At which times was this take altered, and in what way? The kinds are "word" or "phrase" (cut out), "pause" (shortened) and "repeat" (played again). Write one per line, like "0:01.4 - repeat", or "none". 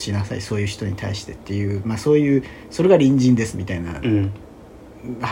none